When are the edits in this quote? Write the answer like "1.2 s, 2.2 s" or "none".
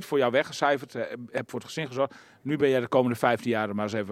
none